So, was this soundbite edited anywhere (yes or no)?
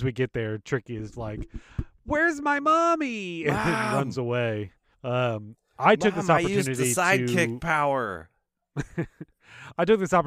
yes